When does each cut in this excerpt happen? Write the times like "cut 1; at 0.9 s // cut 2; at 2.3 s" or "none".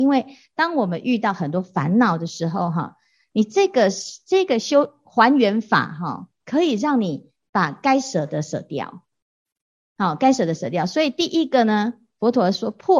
none